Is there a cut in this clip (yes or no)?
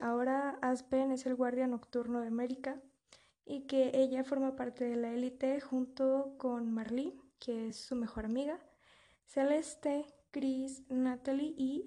no